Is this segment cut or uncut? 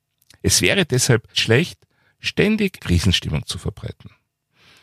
cut